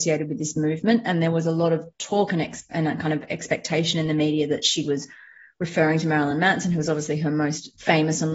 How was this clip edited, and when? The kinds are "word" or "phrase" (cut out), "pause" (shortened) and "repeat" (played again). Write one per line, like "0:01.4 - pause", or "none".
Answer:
none